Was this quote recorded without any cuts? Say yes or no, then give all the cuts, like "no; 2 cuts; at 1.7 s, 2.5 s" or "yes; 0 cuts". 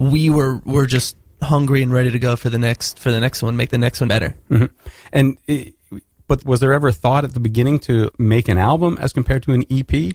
no; 3 cuts; at 4.1 s, 6.4 s, 8.1 s